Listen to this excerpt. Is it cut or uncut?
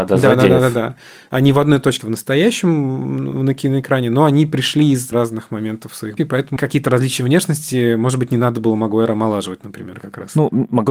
cut